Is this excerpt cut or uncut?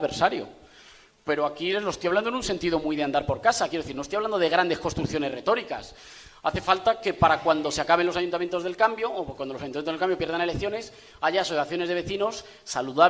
uncut